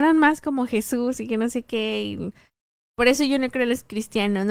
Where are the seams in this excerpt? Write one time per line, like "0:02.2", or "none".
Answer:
none